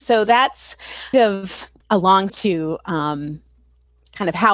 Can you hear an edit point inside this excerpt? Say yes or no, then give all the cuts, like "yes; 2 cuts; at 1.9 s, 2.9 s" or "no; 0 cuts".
yes; 3 cuts; at 1.1 s, 1.8 s, 2.3 s